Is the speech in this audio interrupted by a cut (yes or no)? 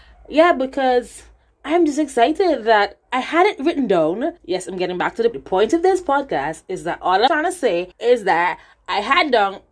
yes